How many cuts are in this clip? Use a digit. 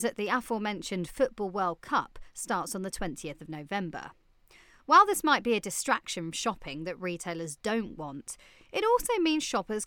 1